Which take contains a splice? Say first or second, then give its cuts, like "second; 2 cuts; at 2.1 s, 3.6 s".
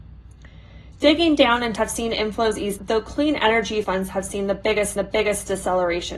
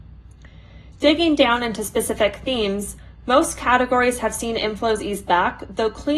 first; 4 cuts; at 1.8 s, 2.8 s, 3.8 s, 5.0 s